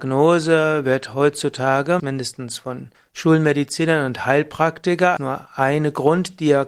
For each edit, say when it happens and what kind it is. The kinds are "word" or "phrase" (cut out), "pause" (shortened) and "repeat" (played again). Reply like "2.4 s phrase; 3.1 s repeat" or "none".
2.0 s word; 2.9 s pause; 5.2 s word